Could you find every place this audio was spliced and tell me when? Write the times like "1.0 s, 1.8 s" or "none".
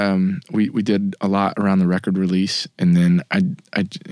2.7 s